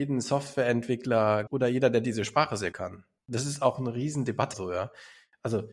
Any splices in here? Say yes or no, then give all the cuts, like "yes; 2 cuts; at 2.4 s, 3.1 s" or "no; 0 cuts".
yes; 4 cuts; at 1.5 s, 2.7 s, 3.2 s, 4.5 s